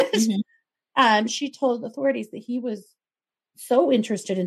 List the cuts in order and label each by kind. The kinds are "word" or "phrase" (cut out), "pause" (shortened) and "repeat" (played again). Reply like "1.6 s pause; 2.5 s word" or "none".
none